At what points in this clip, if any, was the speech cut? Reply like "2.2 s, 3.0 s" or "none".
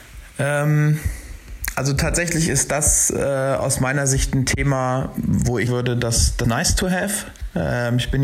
5.7 s, 6.4 s

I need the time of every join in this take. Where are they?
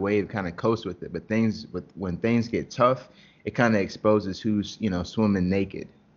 none

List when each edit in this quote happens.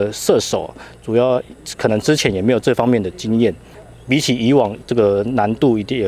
none

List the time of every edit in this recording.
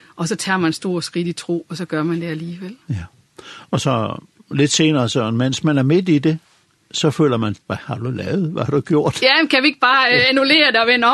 7.6 s

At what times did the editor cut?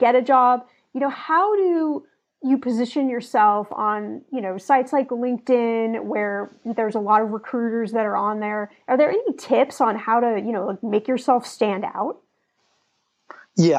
1.1 s

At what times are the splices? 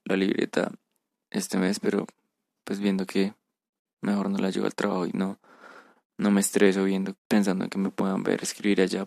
7.2 s

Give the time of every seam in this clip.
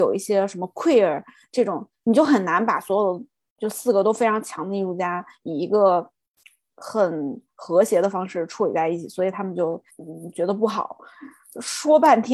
9.9 s

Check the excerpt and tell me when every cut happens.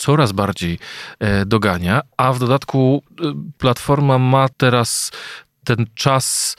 4.5 s

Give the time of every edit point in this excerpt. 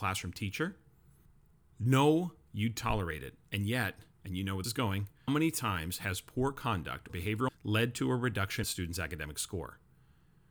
2.5 s, 4.6 s, 5.3 s, 7.1 s, 7.5 s, 8.6 s

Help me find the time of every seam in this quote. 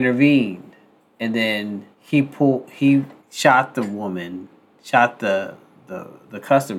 1.0 s, 1.9 s, 3.2 s

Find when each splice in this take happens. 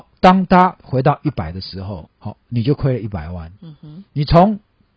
2.1 s

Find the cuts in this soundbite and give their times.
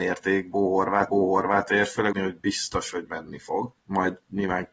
1.1 s, 2.1 s, 3.8 s

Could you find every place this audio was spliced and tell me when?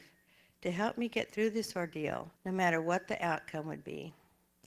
2.4 s

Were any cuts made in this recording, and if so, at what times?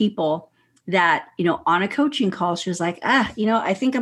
none

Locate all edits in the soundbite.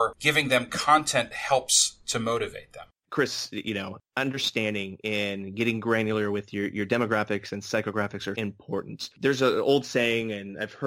1.3 s, 8.3 s

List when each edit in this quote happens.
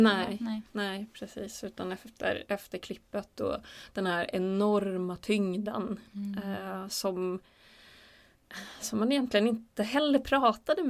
none

